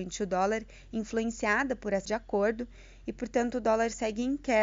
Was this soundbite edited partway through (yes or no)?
yes